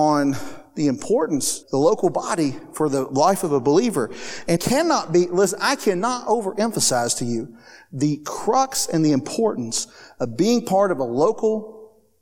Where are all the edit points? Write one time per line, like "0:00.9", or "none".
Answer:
0:01.6
0:04.6